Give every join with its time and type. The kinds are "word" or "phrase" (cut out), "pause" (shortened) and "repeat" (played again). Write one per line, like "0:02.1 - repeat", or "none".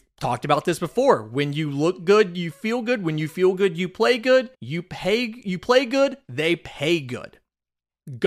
0:04.5 - pause